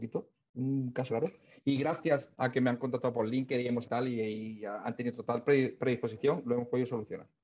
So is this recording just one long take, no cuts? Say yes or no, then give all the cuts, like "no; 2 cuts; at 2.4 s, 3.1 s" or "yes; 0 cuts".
no; 3 cuts; at 1.1 s, 2.3 s, 3.8 s